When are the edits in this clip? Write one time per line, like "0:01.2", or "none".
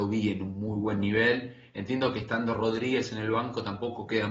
none